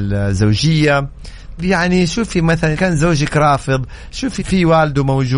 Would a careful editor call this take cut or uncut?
cut